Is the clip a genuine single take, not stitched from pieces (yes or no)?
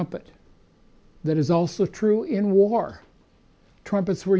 yes